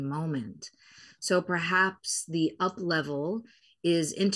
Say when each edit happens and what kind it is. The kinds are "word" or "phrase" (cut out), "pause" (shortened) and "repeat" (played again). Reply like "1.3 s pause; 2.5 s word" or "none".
none